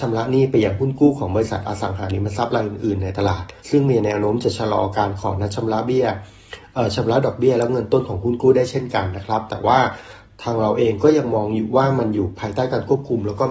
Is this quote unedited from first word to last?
no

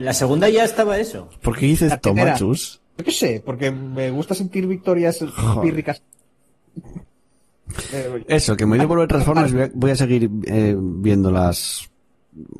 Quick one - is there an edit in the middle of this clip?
yes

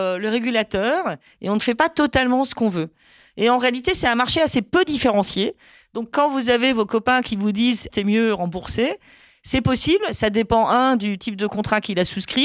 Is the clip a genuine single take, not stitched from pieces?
no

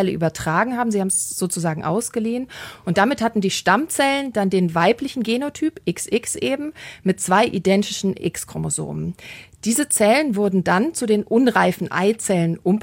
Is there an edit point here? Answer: no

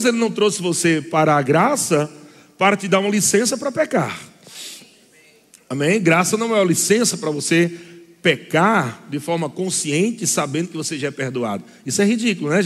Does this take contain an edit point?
no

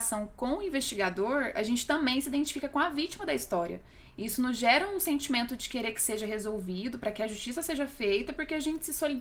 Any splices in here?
no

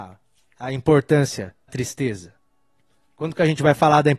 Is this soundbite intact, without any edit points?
no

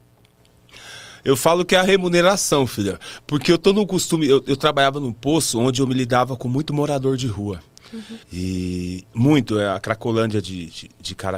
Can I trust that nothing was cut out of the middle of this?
no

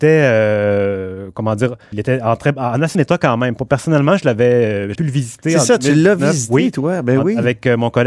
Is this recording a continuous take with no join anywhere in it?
no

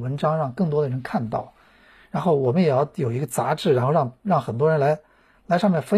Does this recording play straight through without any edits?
yes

